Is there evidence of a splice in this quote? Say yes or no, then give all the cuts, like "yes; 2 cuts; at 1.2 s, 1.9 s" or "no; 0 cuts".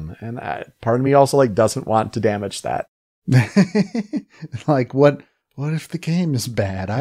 no; 0 cuts